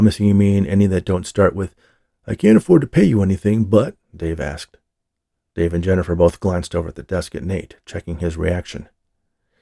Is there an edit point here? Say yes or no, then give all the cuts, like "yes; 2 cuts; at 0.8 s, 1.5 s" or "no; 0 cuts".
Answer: yes; 1 cut; at 4.0 s